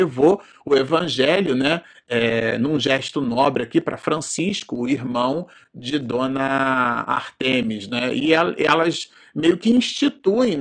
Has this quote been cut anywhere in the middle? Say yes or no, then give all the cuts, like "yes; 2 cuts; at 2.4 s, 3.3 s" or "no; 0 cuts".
no; 0 cuts